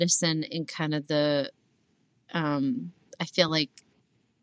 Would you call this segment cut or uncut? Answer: uncut